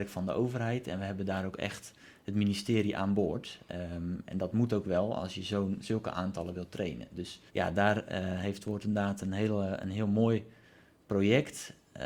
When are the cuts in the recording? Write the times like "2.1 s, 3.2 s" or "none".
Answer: 7.5 s